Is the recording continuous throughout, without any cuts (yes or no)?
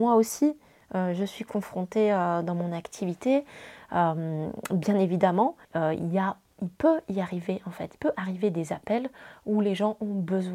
no